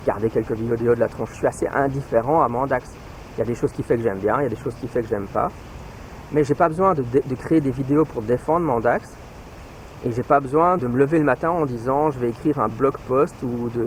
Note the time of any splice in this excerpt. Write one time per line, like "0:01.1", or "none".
0:01.3
0:10.8